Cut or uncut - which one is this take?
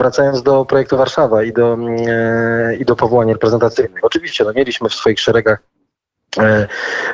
uncut